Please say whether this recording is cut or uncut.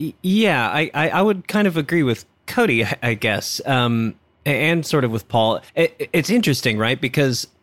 cut